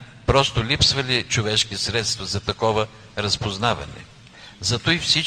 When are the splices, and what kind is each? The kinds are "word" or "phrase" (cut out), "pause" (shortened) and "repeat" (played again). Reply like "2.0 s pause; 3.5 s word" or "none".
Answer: none